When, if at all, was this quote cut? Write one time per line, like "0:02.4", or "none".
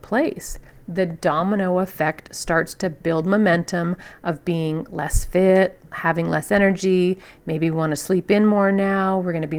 none